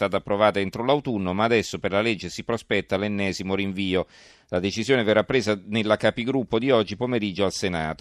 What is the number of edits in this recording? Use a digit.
0